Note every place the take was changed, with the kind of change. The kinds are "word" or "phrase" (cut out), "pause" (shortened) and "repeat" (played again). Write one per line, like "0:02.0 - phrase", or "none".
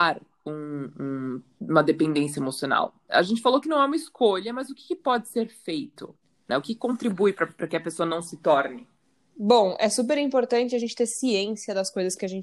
none